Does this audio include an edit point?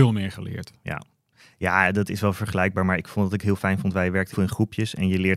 yes; 1 cut; at 4.3 s

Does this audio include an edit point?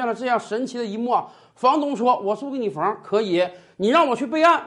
no; 0 cuts

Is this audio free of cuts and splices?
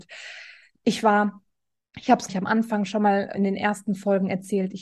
no; 2 cuts; at 2.3 s, 3.3 s

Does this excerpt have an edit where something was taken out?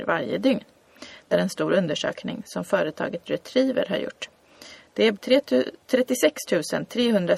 yes; 2 cuts; at 1.3 s, 5.1 s

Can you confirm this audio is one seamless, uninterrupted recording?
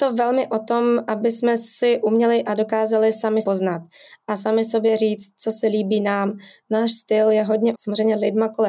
no; 2 cuts; at 3.4 s, 7.7 s

